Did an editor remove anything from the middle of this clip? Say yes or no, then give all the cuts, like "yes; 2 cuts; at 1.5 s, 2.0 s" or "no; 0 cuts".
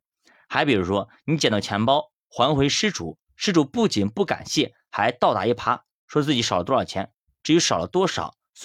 no; 0 cuts